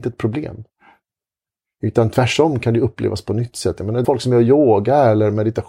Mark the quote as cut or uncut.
cut